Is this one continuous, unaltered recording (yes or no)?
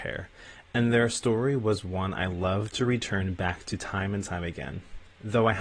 yes